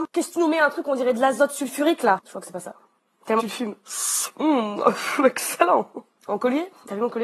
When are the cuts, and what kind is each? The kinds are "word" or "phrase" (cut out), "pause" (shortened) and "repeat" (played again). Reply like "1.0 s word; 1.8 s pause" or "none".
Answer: 2.2 s pause; 3.4 s phrase